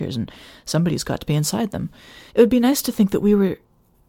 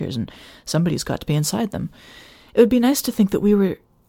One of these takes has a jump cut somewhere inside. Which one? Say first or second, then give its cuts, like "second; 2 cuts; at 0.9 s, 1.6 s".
first; 1 cut; at 2.3 s